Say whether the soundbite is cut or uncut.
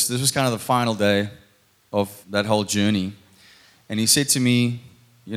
cut